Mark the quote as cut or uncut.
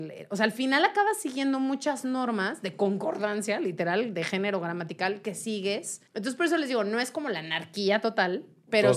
cut